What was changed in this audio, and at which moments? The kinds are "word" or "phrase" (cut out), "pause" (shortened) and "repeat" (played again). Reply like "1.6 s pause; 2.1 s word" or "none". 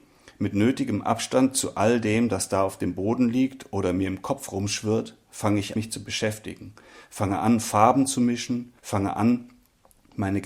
5.8 s word; 8.8 s pause